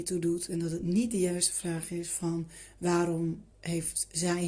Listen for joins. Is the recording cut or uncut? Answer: cut